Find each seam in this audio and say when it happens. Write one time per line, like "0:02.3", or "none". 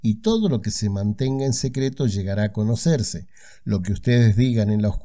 none